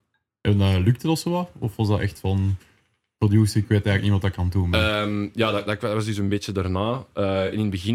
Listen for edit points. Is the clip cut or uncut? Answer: uncut